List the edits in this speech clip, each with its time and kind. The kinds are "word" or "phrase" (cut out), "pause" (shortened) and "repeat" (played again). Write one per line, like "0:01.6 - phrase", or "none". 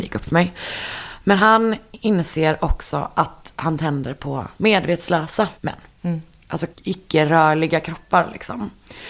0:05.5 - pause
0:06.7 - pause